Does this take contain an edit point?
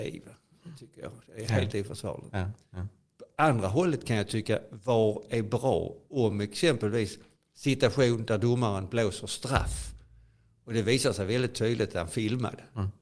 no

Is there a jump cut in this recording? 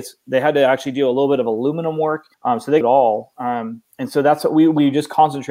yes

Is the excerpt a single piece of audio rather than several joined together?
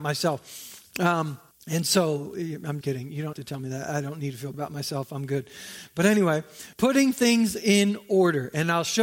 no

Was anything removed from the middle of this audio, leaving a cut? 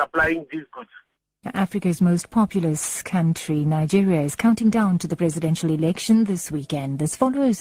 no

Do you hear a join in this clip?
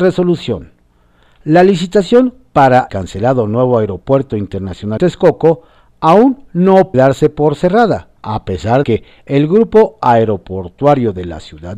yes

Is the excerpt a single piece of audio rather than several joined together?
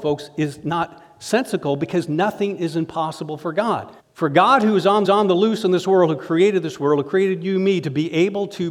no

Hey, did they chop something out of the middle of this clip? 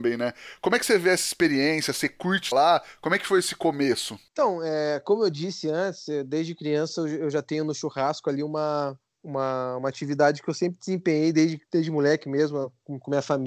yes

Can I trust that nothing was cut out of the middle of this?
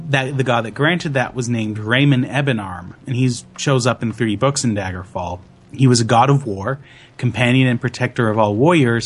yes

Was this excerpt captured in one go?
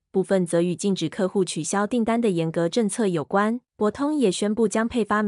no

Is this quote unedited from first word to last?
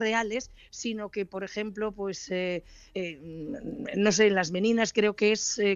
yes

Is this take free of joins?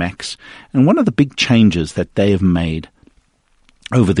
yes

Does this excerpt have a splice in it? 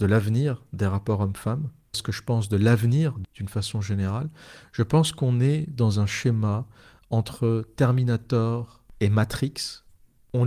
yes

